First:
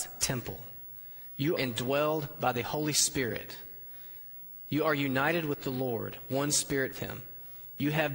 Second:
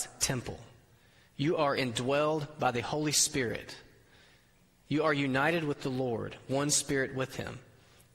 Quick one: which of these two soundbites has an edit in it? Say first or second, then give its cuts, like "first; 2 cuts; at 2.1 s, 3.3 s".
first; 2 cuts; at 1.6 s, 6.9 s